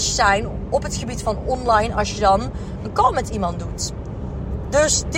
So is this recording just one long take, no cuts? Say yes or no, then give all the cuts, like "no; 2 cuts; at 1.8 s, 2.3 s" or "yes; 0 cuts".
yes; 0 cuts